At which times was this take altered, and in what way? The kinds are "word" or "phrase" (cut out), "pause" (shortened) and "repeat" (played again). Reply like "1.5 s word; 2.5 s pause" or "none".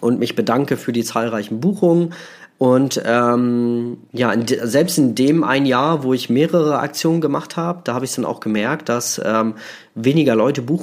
4.1 s pause